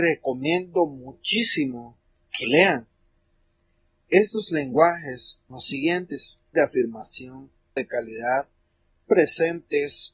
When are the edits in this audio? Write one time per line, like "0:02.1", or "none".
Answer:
0:02.4
0:05.5
0:06.5
0:07.8
0:09.1